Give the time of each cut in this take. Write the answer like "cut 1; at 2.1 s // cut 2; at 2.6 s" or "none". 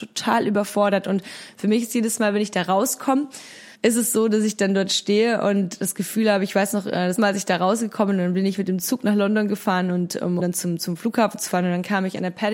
cut 1; at 3.7 s // cut 2; at 7.2 s // cut 3; at 10.4 s